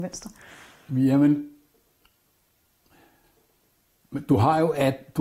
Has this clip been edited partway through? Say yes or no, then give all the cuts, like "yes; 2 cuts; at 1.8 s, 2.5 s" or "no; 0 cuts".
no; 0 cuts